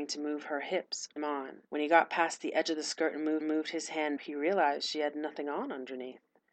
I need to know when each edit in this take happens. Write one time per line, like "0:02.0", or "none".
0:01.2
0:01.7
0:03.4
0:04.2